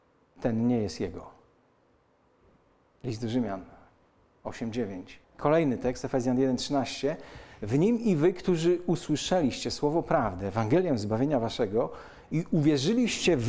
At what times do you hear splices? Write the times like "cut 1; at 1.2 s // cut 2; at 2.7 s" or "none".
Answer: cut 1; at 5.2 s

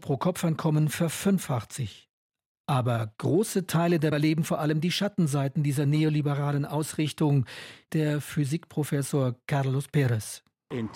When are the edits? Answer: cut 1; at 4.1 s // cut 2; at 7.9 s

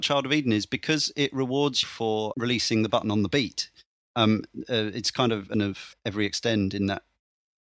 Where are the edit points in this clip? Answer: cut 1; at 1.8 s // cut 2; at 2.3 s // cut 3; at 5.5 s // cut 4; at 5.9 s

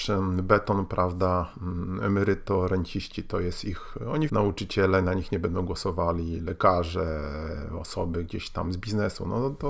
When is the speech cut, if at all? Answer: cut 1; at 4.3 s

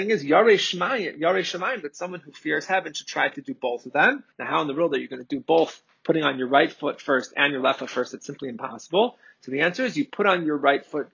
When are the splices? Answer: cut 1; at 4.3 s

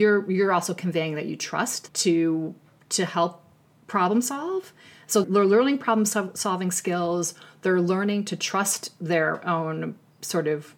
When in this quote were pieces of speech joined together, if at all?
cut 1; at 1.9 s // cut 2; at 5.2 s

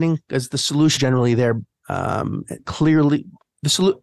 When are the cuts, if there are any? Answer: cut 1; at 1.0 s // cut 2; at 2.6 s

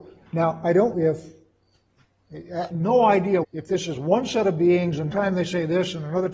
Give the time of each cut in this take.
cut 1; at 0.9 s // cut 2; at 2.7 s // cut 3; at 3.4 s // cut 4; at 5.1 s

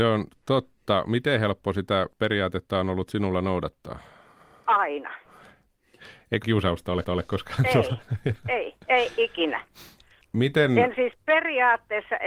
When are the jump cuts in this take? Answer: cut 1; at 2.1 s // cut 2; at 6.4 s // cut 3; at 7.0 s // cut 4; at 8.8 s // cut 5; at 10.2 s // cut 6; at 11.1 s

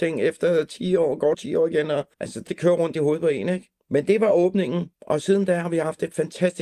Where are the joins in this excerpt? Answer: cut 1; at 1.3 s // cut 2; at 2.1 s // cut 3; at 2.5 s // cut 4; at 3.8 s // cut 5; at 4.9 s

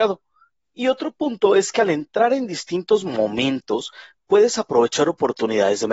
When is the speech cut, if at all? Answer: none

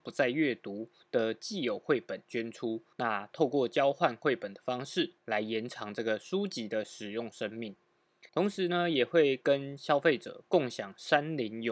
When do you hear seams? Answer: cut 1; at 2.9 s // cut 2; at 5.2 s // cut 3; at 8.3 s

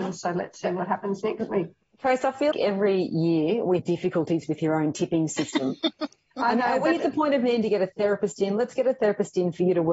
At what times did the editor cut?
cut 1; at 2.5 s // cut 2; at 3.8 s // cut 3; at 5.9 s

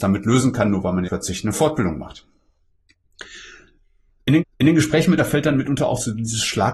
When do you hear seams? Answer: cut 1; at 1.0 s // cut 2; at 4.4 s // cut 3; at 5.2 s

